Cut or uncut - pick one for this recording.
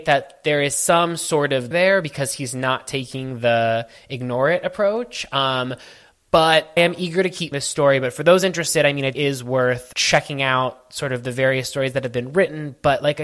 cut